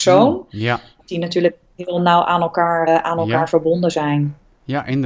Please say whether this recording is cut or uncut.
cut